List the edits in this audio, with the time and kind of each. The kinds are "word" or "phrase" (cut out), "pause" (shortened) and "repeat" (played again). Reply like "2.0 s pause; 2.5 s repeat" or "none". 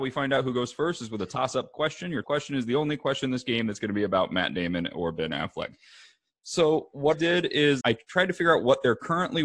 2.2 s word; 7.1 s word; 7.8 s word